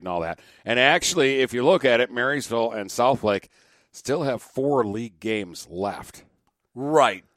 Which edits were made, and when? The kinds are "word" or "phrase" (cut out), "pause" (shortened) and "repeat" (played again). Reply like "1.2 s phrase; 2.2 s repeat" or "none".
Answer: none